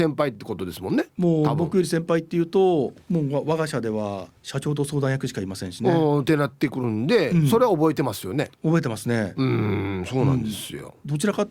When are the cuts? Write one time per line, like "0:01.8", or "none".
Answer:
0:01.1
0:03.0
0:04.4
0:08.5